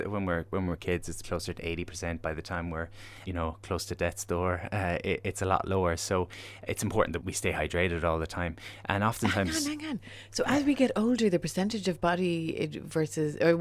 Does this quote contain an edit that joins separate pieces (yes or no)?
yes